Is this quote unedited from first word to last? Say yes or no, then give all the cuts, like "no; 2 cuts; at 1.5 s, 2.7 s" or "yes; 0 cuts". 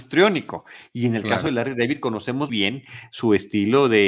no; 1 cut; at 2.5 s